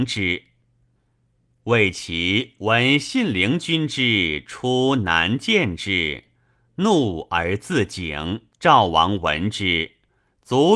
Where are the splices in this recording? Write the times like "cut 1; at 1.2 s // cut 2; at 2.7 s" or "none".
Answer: cut 1; at 8.5 s